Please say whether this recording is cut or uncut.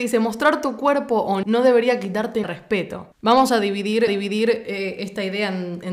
cut